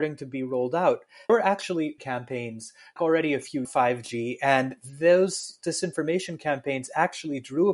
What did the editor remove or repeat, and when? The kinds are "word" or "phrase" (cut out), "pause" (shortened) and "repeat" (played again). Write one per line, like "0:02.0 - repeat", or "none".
0:01.3 - word
0:02.0 - phrase
0:03.0 - phrase
0:03.6 - phrase

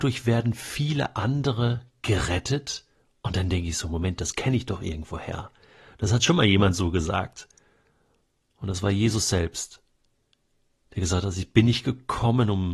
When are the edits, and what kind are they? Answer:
none

